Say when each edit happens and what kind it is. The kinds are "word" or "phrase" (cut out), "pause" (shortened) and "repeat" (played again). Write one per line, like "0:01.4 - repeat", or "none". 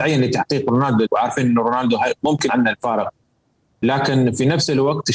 0:01.1 - word
0:02.5 - word